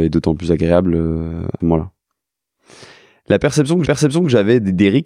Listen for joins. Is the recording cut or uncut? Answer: cut